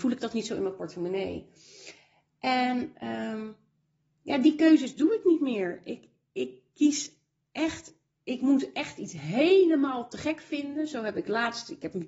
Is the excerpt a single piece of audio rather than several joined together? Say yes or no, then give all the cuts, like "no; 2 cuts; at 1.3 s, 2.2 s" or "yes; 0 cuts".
yes; 0 cuts